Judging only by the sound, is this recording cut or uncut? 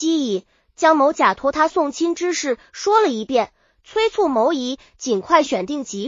uncut